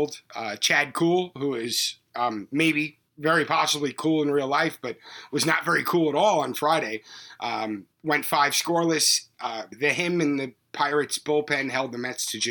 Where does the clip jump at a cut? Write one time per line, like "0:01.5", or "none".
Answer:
0:03.1
0:07.9